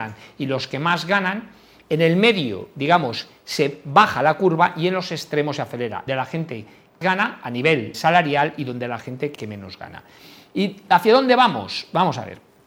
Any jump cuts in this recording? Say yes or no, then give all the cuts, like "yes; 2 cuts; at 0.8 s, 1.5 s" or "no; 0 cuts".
yes; 4 cuts; at 6.1 s, 7.0 s, 7.9 s, 9.4 s